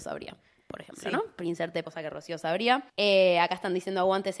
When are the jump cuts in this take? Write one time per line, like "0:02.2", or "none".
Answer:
0:01.8
0:02.9